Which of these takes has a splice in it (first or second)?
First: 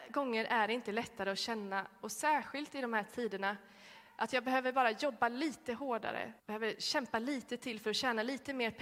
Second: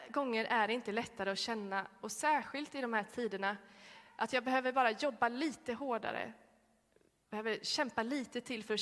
first